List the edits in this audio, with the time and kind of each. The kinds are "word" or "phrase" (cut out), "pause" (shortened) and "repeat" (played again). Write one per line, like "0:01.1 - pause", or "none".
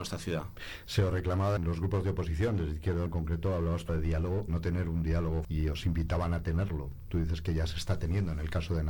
0:01.6 - word
0:03.1 - word
0:03.9 - word
0:04.5 - word
0:05.4 - word